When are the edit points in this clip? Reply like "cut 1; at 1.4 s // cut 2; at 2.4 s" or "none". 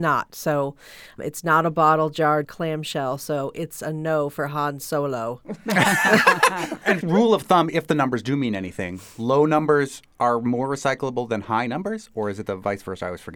cut 1; at 1.2 s // cut 2; at 2.4 s // cut 3; at 7.0 s

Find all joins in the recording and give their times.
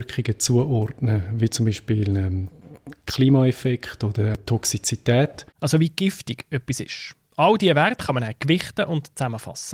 none

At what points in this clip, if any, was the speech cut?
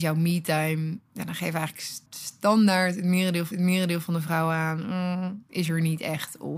cut 1; at 1.1 s // cut 2; at 2.1 s // cut 3; at 3.5 s

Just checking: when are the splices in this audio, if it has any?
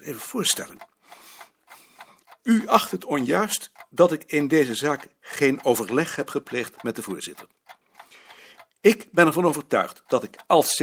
none

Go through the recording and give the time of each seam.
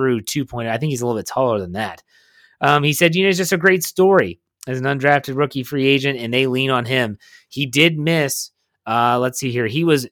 none

